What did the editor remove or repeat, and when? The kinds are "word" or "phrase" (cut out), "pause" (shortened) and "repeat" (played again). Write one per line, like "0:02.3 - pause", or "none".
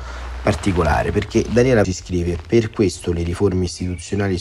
0:01.8 - word